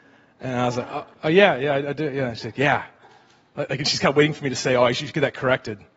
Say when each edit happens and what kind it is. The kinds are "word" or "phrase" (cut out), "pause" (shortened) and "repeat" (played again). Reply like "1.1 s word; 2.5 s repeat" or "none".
1.1 s pause